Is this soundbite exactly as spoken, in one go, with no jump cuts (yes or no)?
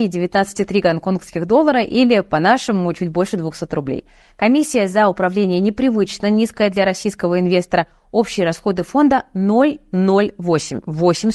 yes